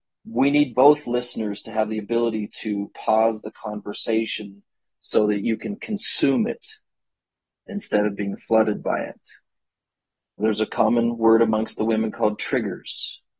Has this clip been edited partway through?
no; 0 cuts

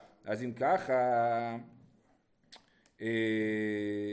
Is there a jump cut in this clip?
no; 0 cuts

